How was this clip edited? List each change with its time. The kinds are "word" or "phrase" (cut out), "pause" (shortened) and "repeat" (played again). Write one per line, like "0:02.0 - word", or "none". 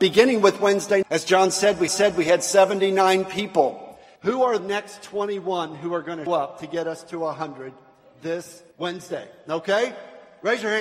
0:01.0 - word
0:01.9 - repeat
0:04.2 - pause
0:04.6 - word
0:06.3 - word
0:08.7 - pause